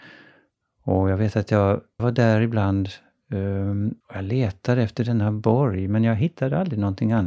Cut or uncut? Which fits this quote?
cut